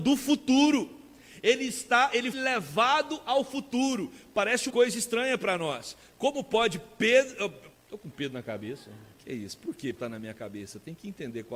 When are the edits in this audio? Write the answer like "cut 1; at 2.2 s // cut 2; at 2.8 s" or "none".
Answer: cut 1; at 2.3 s // cut 2; at 4.7 s // cut 3; at 7.7 s // cut 4; at 9.1 s // cut 5; at 9.9 s